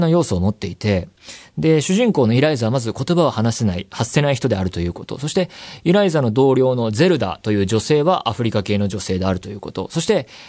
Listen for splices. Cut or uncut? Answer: uncut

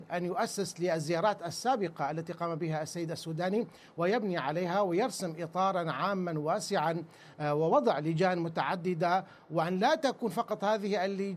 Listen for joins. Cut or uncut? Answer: uncut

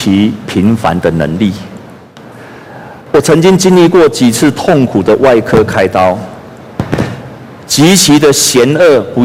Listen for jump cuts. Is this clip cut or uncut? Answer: cut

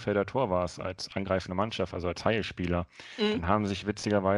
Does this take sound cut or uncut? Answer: uncut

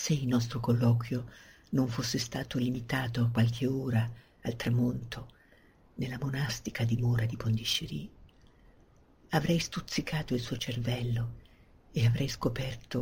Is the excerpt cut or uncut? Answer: uncut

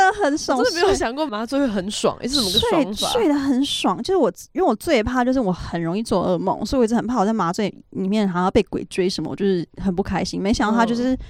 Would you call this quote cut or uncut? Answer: uncut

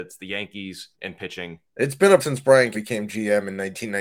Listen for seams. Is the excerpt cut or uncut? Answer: cut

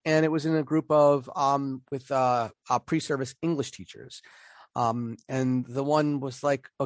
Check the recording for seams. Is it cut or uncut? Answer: uncut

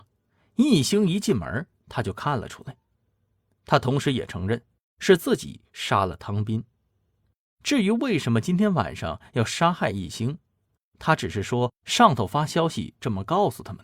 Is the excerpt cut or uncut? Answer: uncut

